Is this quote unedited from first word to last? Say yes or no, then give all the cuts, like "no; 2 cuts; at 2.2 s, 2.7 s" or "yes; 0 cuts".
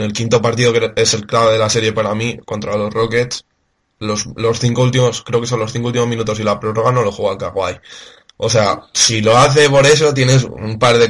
yes; 0 cuts